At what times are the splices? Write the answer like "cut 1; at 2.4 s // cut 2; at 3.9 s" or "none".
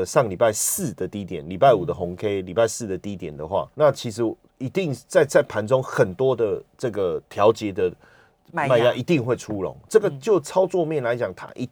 cut 1; at 3.7 s